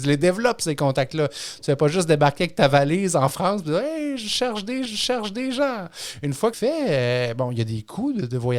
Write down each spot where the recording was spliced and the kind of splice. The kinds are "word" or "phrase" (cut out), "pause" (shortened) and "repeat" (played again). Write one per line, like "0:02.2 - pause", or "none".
0:04.9 - repeat
0:06.5 - phrase